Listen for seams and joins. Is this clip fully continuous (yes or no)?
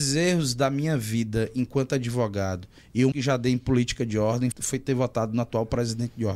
no